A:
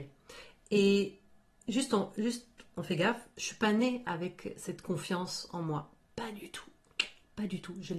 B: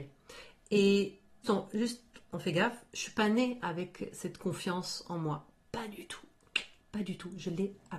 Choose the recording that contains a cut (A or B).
B